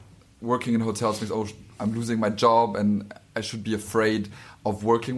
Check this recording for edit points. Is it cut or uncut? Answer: uncut